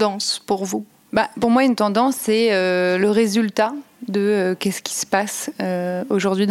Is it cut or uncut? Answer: uncut